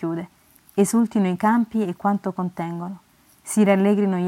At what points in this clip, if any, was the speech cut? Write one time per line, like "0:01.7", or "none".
none